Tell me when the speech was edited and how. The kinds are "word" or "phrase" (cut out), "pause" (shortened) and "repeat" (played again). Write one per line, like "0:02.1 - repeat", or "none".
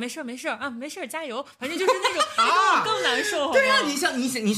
none